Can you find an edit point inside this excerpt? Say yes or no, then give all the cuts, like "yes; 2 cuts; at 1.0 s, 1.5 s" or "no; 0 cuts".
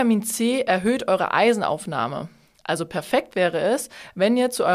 no; 0 cuts